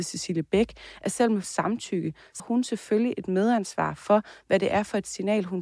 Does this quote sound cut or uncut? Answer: cut